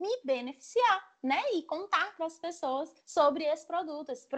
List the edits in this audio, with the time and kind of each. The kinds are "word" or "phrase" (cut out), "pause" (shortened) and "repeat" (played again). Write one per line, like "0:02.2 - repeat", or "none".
0:03.0 - pause